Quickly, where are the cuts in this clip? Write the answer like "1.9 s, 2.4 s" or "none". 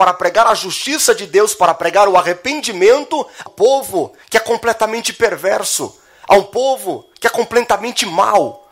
3.5 s